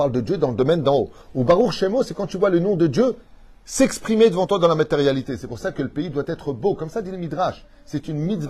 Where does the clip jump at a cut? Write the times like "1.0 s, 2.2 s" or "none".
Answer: none